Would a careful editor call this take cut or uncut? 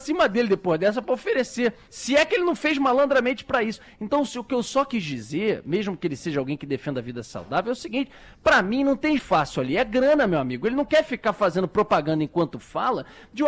cut